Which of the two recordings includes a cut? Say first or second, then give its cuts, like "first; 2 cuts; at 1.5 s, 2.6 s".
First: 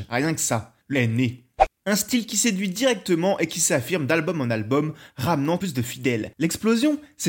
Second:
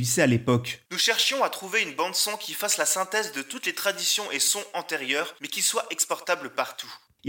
first; 2 cuts; at 0.9 s, 5.6 s